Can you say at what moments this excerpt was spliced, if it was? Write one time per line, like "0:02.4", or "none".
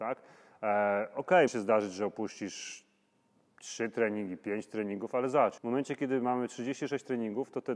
0:01.5
0:05.6